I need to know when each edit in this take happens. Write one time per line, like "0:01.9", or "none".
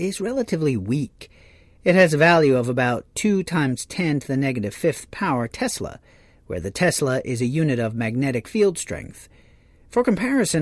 none